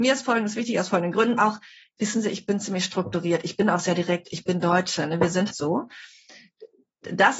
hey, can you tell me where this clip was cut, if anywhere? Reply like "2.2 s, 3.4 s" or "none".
1.4 s, 5.5 s